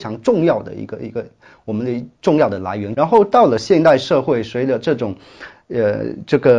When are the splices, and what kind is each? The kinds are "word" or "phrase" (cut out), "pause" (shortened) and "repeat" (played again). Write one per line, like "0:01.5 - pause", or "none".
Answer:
none